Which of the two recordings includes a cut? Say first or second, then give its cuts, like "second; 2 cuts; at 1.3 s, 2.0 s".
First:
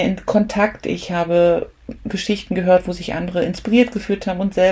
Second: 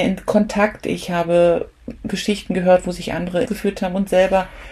second; 1 cut; at 3.4 s